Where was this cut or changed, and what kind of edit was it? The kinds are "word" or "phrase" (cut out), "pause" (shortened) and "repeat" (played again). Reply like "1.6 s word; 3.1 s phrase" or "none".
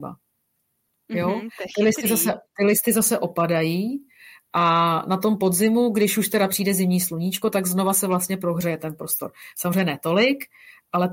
2.5 s pause